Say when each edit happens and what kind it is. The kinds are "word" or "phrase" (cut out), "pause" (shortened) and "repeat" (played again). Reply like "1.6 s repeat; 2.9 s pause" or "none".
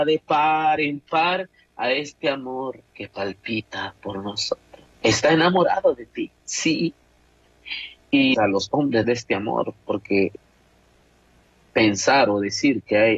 2.9 s pause; 4.9 s pause; 6.4 s pause; 8.3 s phrase; 9.0 s phrase